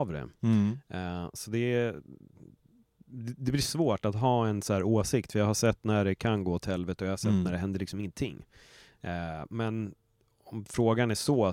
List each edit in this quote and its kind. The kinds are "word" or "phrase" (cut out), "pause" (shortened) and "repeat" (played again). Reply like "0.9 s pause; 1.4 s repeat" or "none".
none